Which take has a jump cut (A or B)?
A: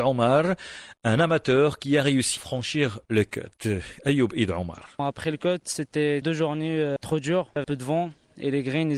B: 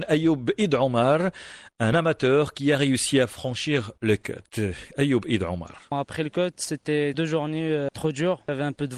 A